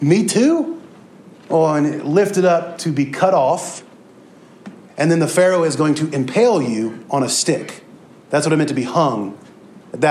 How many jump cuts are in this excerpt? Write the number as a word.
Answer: zero